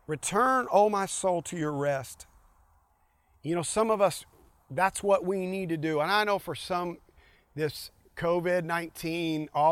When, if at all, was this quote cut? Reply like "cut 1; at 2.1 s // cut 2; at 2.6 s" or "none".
none